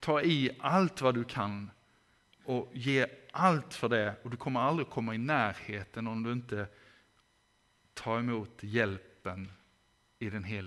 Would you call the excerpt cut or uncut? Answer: uncut